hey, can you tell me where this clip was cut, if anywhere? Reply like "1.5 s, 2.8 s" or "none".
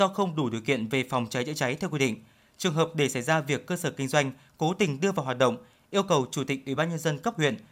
none